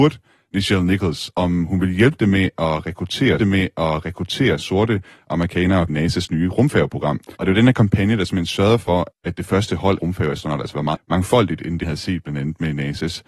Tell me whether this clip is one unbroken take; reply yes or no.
no